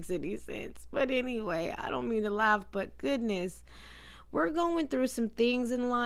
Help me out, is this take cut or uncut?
uncut